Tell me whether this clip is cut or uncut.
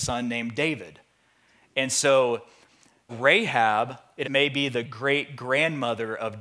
cut